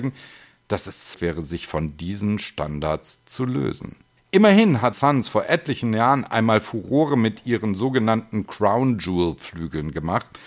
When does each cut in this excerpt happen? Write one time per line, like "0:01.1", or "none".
0:01.1
0:04.2
0:04.9